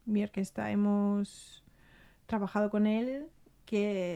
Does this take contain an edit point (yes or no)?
no